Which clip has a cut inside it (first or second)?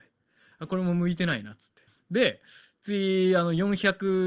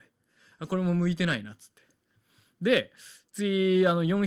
first